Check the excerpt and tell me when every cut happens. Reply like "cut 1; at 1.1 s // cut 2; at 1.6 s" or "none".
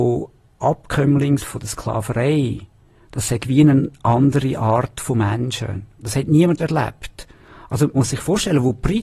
cut 1; at 1.4 s // cut 2; at 6.6 s // cut 3; at 7.9 s